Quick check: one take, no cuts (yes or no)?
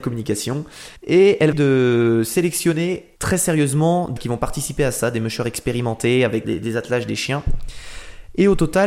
no